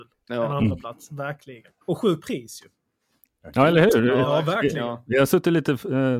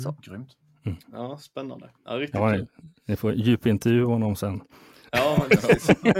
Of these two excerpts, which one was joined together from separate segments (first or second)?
first